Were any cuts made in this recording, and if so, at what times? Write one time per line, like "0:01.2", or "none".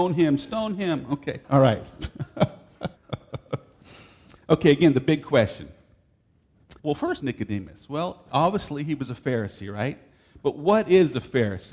0:01.4
0:03.0
0:06.8
0:07.2